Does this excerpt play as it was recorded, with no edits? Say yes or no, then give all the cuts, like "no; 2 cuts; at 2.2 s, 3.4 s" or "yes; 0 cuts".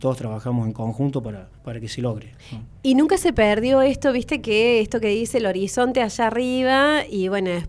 no; 2 cuts; at 1.6 s, 2.8 s